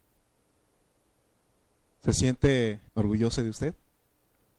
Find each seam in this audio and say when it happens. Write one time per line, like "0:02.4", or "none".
0:02.9

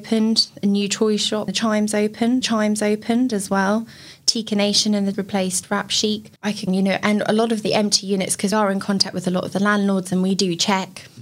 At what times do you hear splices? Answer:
0:01.5
0:02.4
0:05.1
0:06.4
0:06.7
0:08.5

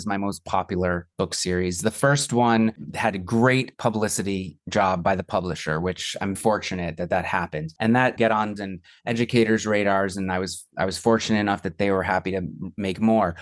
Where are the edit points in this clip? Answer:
0:06.4
0:08.2
0:08.6

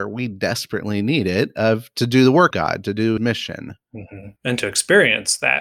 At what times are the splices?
0:02.5
0:03.2
0:04.4

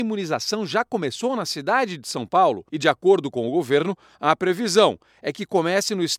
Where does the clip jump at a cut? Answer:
0:02.7

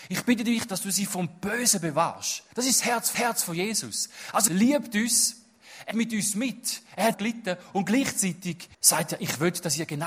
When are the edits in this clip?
0:02.5
0:03.1
0:04.5
0:05.9
0:07.1
0:08.7

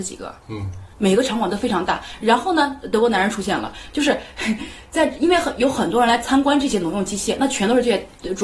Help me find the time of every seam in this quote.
0:00.9

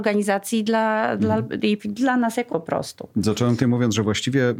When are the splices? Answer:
0:01.8
0:02.5
0:03.6

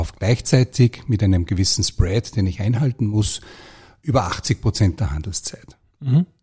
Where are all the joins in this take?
none

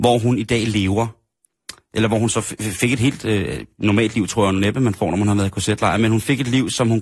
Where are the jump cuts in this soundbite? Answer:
none

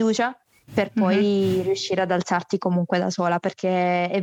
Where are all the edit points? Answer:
none

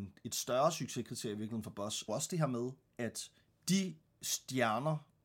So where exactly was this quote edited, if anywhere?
0:02.1

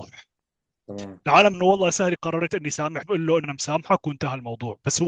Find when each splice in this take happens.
0:01.5
0:02.2
0:03.0
0:03.4

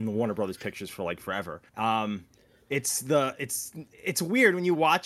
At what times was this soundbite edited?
0:01.7
0:03.9

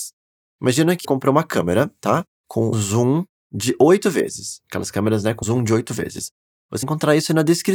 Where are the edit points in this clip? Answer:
0:01.0
0:02.7
0:05.4
0:06.8

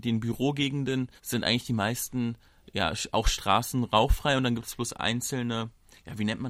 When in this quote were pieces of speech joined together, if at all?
0:01.2

